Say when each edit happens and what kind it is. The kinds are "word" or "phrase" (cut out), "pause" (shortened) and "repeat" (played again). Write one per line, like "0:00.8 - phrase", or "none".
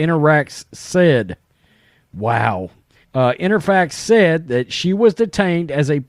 0:03.0 - pause